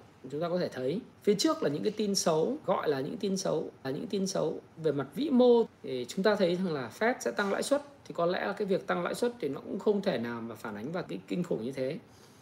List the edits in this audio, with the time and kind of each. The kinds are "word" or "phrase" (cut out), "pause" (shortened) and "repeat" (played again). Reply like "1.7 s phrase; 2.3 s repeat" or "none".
1.1 s pause; 2.6 s word; 3.8 s repeat; 5.7 s word; 11.1 s phrase